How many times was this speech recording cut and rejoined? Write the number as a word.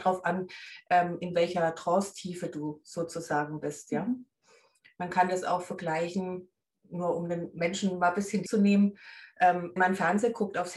two